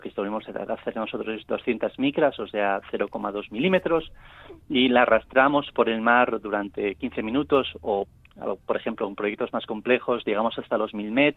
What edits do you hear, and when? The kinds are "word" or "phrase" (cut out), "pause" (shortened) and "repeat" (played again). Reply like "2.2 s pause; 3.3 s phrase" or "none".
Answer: none